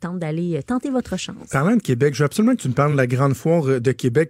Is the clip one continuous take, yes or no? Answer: yes